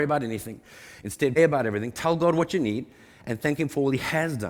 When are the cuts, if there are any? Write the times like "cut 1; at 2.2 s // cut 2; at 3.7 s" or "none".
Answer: cut 1; at 1.4 s